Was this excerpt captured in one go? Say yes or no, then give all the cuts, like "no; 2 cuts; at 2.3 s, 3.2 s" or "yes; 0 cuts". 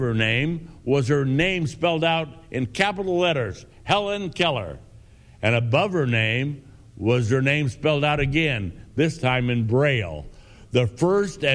yes; 0 cuts